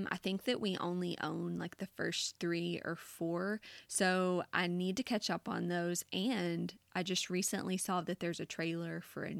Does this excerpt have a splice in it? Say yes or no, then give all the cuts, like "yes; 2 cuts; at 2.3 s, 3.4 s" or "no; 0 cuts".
no; 0 cuts